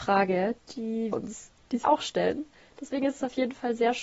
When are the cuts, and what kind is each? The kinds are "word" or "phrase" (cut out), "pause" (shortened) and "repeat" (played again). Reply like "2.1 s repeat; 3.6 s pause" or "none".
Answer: 1.1 s word; 1.8 s word